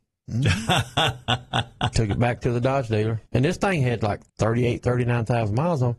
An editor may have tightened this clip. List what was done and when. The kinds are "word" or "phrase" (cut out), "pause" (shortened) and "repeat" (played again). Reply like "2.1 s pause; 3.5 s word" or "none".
3.3 s pause; 4.3 s pause